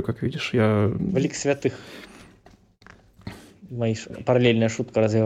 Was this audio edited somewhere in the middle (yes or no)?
yes